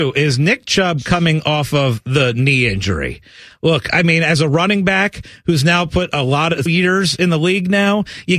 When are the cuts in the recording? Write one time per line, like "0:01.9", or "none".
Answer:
0:06.7